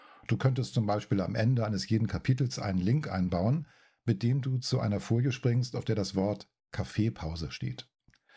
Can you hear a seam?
no; 0 cuts

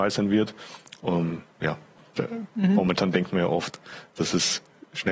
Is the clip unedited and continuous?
yes; 0 cuts

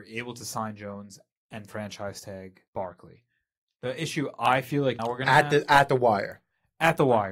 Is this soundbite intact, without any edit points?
no; 2 cuts; at 2.7 s, 5.0 s

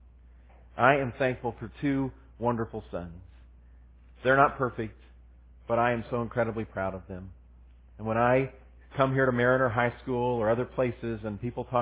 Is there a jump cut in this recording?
no; 0 cuts

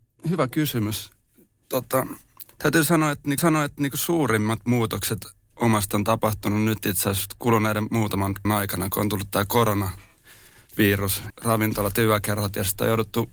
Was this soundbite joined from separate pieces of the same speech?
yes; 5 cuts; at 2.5 s, 3.4 s, 5.9 s, 8.4 s, 11.3 s

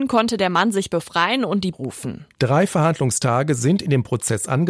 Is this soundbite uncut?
no; 2 cuts; at 1.7 s, 2.3 s

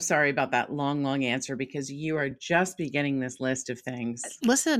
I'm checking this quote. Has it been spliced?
no; 0 cuts

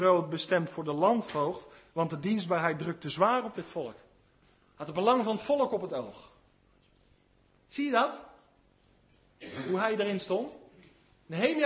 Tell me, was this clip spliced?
no; 0 cuts

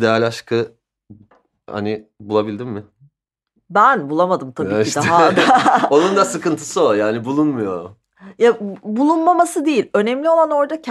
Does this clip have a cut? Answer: no; 0 cuts

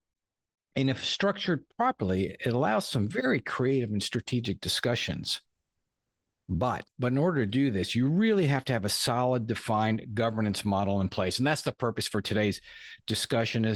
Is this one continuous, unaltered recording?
yes; 0 cuts

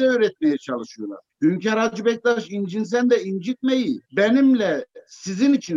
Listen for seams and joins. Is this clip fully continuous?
no; 2 cuts; at 1.3 s, 4.0 s

